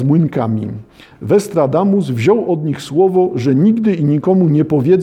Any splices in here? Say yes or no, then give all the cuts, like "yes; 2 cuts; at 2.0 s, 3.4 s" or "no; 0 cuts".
no; 0 cuts